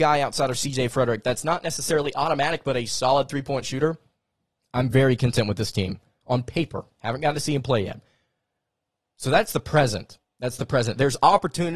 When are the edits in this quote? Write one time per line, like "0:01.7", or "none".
none